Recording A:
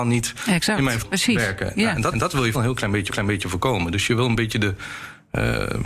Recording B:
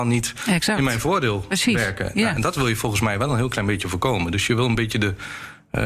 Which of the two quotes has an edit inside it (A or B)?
A